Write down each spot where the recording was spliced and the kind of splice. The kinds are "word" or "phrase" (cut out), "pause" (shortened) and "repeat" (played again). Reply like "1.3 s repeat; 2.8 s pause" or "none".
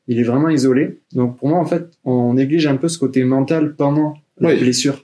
1.0 s pause